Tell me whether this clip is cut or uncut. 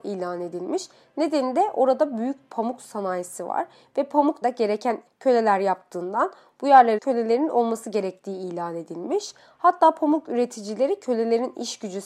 cut